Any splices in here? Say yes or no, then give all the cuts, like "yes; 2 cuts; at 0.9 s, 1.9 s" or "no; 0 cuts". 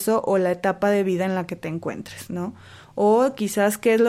no; 0 cuts